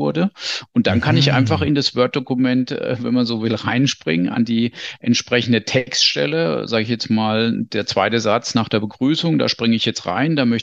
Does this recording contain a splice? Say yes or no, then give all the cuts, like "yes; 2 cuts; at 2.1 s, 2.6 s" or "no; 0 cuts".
no; 0 cuts